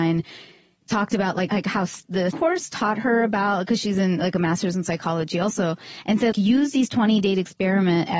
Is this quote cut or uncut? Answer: cut